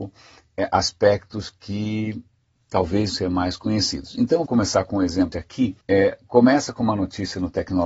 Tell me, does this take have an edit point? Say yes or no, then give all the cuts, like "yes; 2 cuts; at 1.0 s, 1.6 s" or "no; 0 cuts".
yes; 4 cuts; at 3.1 s, 4.5 s, 5.3 s, 5.8 s